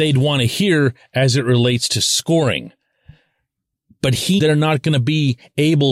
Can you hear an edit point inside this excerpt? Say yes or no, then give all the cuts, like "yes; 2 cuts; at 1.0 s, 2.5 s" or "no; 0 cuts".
yes; 1 cut; at 4.4 s